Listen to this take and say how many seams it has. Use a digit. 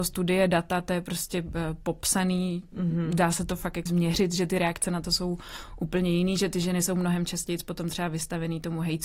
1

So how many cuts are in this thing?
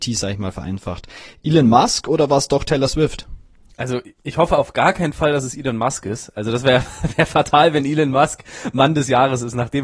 0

